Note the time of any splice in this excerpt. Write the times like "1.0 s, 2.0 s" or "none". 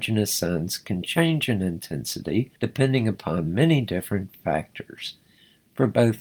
2.6 s